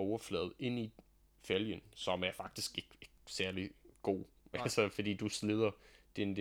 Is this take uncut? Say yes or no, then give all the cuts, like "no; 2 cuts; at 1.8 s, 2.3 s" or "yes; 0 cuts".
yes; 0 cuts